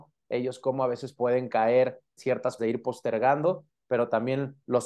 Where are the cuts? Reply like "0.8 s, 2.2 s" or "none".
2.2 s, 2.6 s